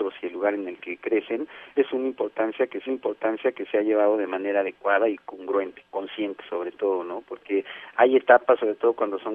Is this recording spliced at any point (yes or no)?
yes